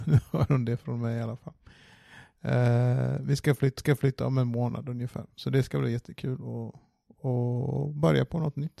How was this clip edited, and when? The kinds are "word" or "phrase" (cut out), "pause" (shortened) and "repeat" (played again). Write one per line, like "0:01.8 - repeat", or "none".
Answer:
0:03.8 - repeat